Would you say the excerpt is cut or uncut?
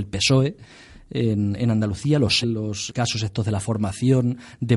cut